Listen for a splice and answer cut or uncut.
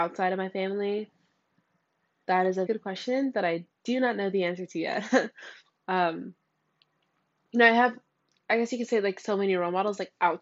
cut